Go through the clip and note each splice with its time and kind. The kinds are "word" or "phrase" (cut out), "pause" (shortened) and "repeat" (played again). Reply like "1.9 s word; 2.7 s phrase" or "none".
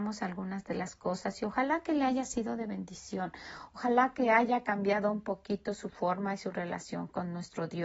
none